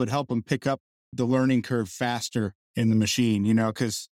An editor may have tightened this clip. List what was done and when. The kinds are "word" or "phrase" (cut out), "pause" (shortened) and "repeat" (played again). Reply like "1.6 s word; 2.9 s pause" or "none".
1.1 s word